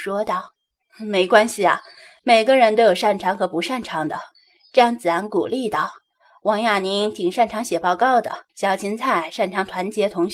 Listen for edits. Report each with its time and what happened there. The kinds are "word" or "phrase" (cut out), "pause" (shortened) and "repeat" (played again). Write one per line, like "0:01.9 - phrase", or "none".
0:04.3 - pause
0:08.5 - pause